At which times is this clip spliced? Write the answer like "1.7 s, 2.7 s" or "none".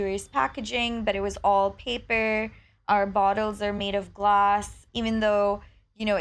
none